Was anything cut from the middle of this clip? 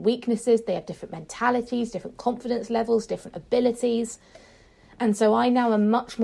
no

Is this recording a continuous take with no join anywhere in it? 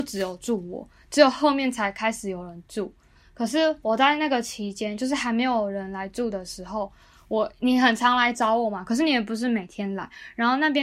yes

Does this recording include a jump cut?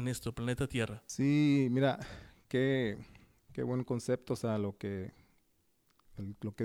no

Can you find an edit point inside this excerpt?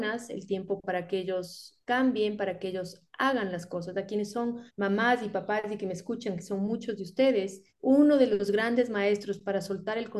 yes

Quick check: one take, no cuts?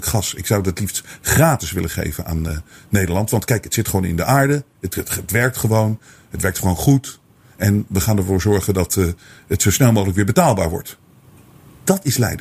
yes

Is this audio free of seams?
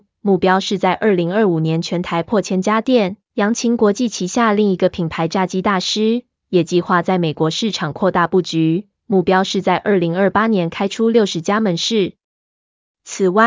no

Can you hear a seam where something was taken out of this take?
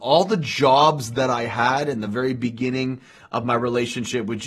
no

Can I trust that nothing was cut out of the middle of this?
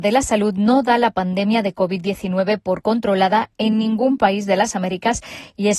yes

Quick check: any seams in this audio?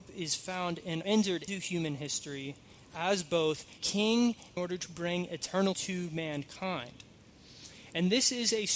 yes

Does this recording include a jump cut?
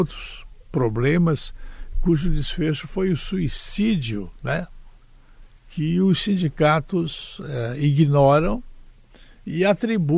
no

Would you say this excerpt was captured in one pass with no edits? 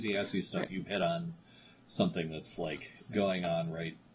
yes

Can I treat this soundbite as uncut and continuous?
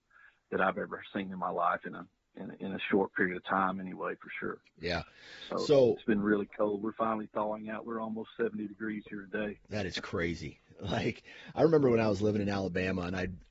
yes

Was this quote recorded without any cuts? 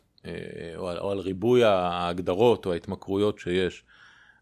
yes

